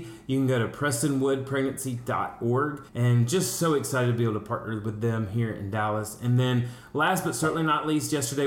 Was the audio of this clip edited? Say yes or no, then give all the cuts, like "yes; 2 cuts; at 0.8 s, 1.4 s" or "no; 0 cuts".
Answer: yes; 1 cut; at 2.9 s